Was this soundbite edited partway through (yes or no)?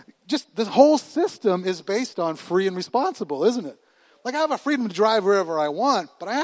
no